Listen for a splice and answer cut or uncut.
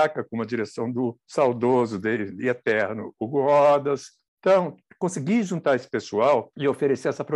uncut